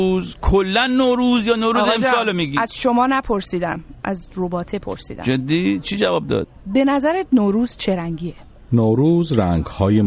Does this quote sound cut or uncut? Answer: uncut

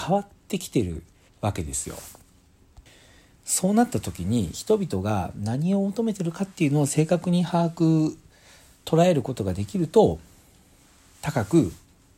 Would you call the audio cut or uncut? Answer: cut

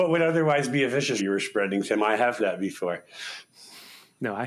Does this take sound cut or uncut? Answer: cut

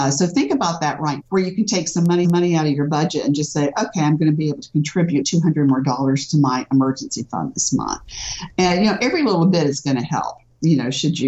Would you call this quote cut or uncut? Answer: cut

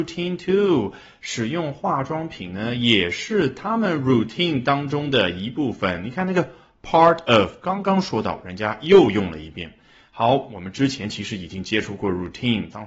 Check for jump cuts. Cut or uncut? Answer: uncut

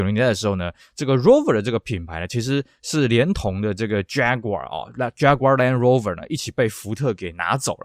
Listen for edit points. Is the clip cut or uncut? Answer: uncut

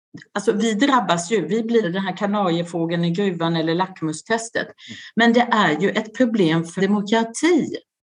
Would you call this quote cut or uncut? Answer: cut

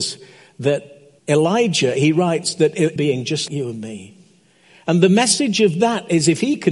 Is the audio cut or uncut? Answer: cut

